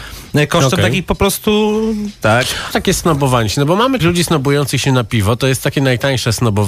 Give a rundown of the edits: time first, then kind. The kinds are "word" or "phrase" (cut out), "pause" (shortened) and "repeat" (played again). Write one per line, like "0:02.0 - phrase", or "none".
0:01.0 - word
0:02.2 - word
0:02.7 - phrase
0:04.0 - word